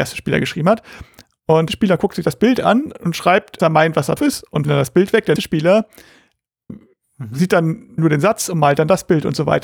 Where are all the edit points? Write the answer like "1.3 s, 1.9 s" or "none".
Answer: 1.7 s, 3.6 s, 4.2 s, 4.6 s, 5.4 s, 6.7 s, 8.0 s